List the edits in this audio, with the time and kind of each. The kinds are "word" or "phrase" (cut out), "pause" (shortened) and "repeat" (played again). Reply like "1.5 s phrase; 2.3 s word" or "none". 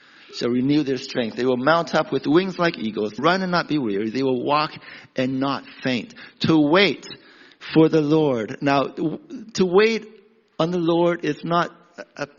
3.2 s word